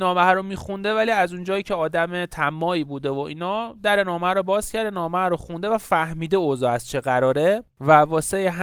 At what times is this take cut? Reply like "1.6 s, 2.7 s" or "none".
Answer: none